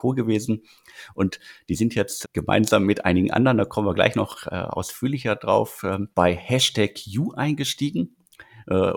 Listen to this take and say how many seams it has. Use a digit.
2